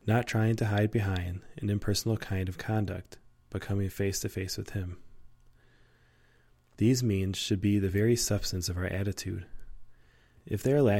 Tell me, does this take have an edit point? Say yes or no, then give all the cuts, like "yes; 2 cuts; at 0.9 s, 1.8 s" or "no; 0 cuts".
no; 0 cuts